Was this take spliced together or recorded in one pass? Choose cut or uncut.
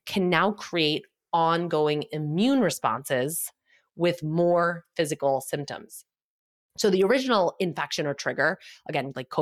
uncut